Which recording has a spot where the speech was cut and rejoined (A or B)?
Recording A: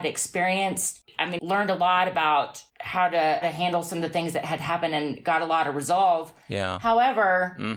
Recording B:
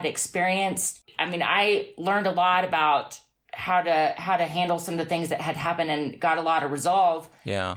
A